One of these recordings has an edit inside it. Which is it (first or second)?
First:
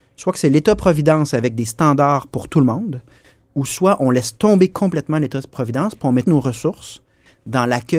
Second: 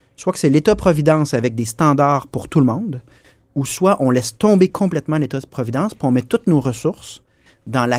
first